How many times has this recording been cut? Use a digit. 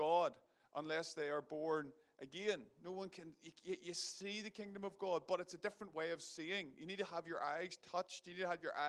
0